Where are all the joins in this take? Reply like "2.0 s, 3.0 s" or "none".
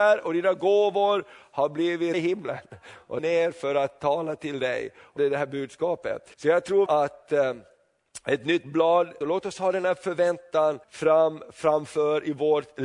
2.1 s, 3.2 s, 5.2 s, 6.3 s, 6.9 s, 9.2 s, 10.8 s